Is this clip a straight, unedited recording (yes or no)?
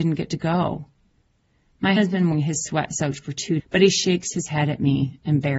no